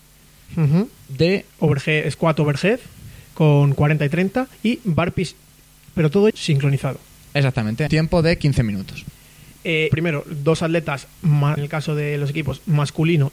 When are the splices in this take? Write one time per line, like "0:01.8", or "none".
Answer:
0:01.5
0:04.5
0:06.3
0:07.9
0:09.9
0:11.6